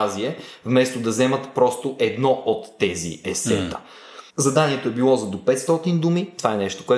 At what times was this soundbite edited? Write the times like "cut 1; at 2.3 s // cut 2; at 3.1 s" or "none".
cut 1; at 4.3 s